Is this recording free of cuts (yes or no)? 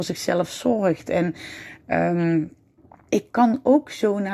no